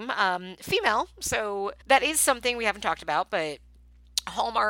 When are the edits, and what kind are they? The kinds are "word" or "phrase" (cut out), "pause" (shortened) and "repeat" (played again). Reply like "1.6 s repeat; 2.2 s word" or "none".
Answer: 1.8 s pause